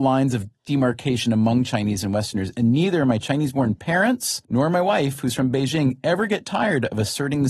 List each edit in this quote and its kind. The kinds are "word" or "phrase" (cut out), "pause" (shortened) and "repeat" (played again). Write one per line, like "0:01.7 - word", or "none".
0:04.4 - pause